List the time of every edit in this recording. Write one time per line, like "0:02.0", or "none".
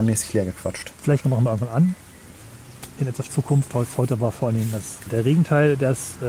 0:01.2
0:03.3
0:05.1